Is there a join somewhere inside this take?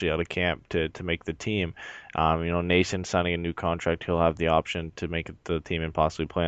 yes; 1 cut; at 4.9 s

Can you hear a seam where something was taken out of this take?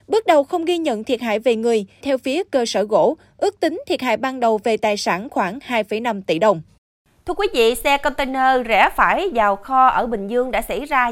yes; 1 cut; at 2.0 s

